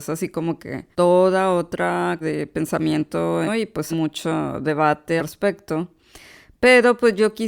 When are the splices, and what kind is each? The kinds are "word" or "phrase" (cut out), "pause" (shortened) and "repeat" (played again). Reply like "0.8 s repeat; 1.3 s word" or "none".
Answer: 0.9 s pause; 2.2 s word; 3.5 s phrase; 3.9 s word; 5.2 s word